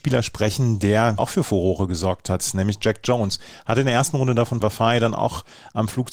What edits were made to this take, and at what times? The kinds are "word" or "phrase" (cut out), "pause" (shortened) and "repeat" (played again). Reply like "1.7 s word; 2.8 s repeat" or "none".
1.2 s word; 4.6 s phrase